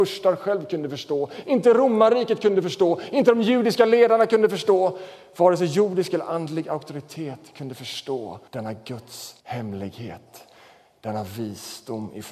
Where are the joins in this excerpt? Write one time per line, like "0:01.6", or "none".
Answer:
0:08.5
0:09.4